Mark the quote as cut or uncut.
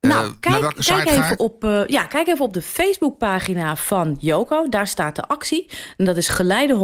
uncut